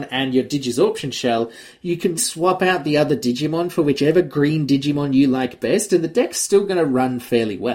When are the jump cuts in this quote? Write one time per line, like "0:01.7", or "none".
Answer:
0:02.2